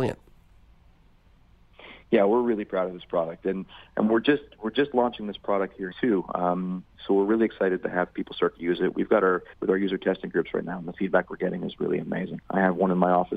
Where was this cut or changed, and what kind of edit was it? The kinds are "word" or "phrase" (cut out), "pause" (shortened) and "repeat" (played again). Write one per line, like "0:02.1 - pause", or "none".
0:05.9 - word
0:09.5 - pause